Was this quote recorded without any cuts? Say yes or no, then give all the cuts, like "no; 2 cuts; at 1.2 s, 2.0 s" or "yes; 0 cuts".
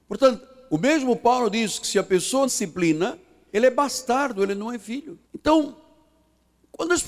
no; 2 cuts; at 2.5 s, 5.2 s